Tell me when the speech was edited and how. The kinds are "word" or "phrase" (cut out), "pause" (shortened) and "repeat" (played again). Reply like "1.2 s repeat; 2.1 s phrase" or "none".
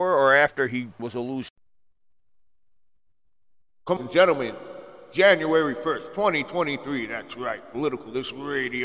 1.0 s word; 4.0 s phrase